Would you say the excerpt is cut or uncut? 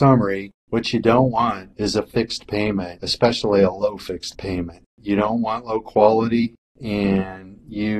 uncut